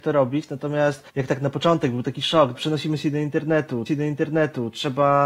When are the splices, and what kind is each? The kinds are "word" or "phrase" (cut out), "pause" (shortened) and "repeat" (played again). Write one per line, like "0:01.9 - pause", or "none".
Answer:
0:01.1 - pause
0:02.5 - word
0:03.9 - repeat